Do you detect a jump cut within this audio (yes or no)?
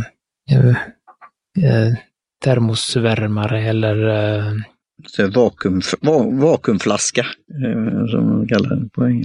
no